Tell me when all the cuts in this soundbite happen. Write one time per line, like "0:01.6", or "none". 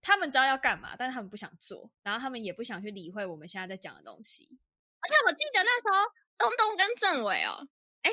0:02.0